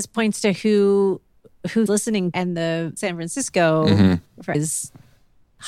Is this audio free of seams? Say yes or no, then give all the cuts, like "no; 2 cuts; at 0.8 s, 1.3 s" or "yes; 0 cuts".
no; 4 cuts; at 1.9 s, 2.3 s, 3.0 s, 4.5 s